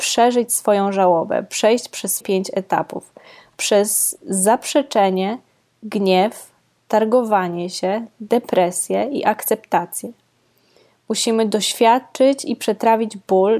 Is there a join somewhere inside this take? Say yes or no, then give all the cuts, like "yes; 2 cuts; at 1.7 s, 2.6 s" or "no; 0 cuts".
yes; 1 cut; at 2.2 s